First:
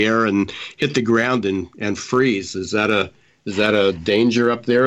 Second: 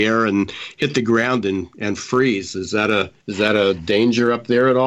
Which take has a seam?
second; 1 cut; at 3.2 s

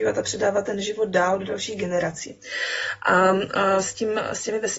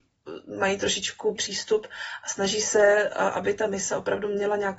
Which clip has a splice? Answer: second; 1 cut; at 1.4 s

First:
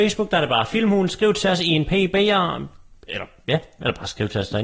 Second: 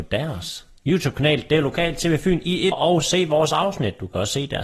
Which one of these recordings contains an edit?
second; 1 cut; at 2.7 s

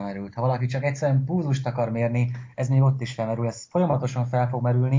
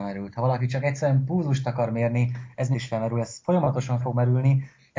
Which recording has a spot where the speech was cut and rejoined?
second; 2 cuts; at 2.7 s, 4.0 s

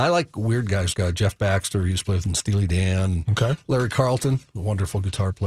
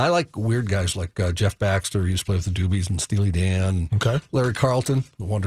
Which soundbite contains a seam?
first; 2 cuts; at 0.9 s, 2.2 s

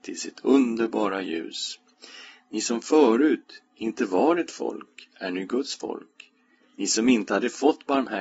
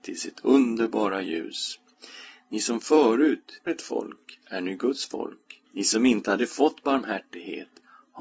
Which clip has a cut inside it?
second; 2 cuts; at 3.7 s, 5.7 s

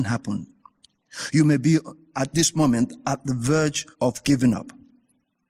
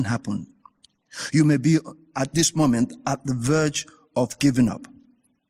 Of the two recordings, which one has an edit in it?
first; 1 cut; at 3.9 s

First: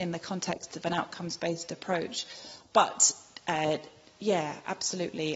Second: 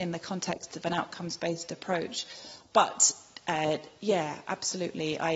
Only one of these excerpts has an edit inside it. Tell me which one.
second; 1 cut; at 4.0 s

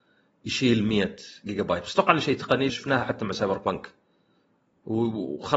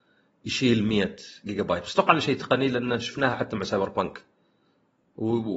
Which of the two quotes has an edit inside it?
first; 1 cut; at 2.7 s

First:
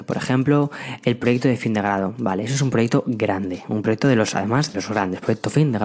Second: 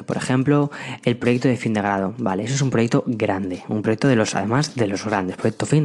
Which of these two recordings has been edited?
first; 1 cut; at 4.7 s

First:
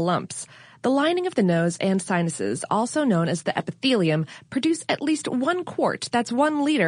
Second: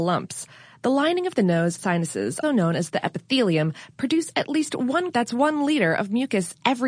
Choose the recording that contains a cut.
second; 3 cuts; at 1.8 s, 2.4 s, 5.1 s

